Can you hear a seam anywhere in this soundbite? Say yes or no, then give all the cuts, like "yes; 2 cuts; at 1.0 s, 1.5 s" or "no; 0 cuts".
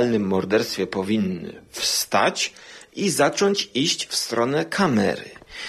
no; 0 cuts